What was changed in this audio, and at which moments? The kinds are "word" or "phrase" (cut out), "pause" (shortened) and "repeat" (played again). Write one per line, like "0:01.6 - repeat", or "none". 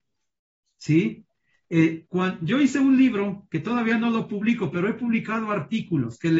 0:02.1 - word